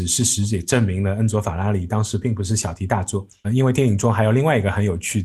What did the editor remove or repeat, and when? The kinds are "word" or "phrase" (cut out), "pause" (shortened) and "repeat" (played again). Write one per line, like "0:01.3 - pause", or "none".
0:03.4 - word